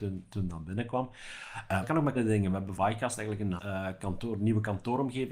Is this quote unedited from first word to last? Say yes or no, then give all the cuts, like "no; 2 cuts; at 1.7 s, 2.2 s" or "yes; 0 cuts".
no; 4 cuts; at 1.8 s, 2.1 s, 2.8 s, 3.6 s